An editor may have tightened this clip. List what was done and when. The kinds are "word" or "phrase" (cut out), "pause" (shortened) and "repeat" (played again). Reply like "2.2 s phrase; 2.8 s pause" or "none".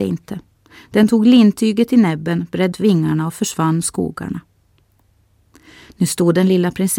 2.7 s word; 3.8 s phrase